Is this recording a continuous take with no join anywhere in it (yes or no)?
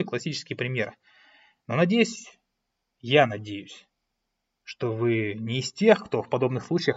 yes